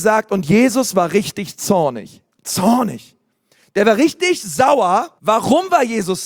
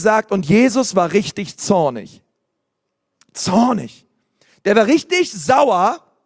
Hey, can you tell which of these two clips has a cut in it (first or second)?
first